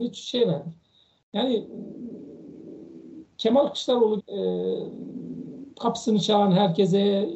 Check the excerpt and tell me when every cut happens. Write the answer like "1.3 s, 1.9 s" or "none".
3.4 s, 4.2 s